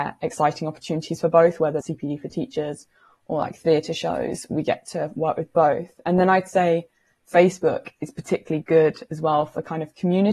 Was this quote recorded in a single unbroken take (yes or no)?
no